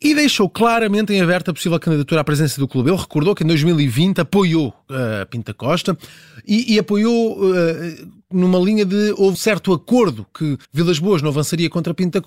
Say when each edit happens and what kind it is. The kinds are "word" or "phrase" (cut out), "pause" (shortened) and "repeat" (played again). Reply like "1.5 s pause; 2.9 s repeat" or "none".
9.3 s word; 10.6 s pause